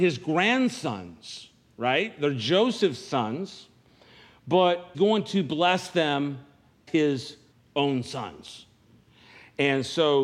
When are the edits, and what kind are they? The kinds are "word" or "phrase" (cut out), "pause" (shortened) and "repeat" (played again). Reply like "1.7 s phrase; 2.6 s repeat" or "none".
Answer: 4.9 s word; 6.9 s word; 7.5 s pause